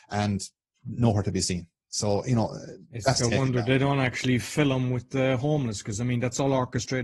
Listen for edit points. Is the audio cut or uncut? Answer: uncut